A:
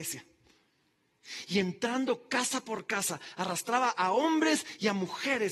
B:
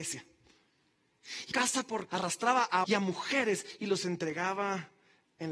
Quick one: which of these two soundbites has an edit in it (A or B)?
B